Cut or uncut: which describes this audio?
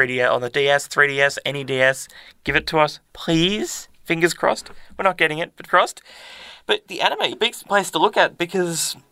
cut